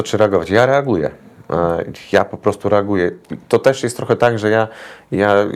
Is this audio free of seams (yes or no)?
yes